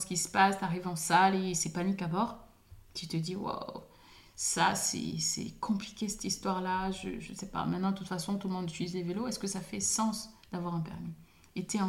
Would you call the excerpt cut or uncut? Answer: uncut